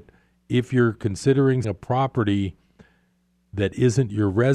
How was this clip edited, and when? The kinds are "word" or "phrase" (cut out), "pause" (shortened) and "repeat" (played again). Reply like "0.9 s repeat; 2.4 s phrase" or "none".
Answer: 1.6 s word